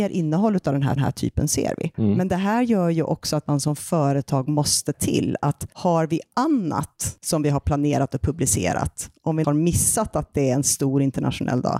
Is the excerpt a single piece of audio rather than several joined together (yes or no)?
no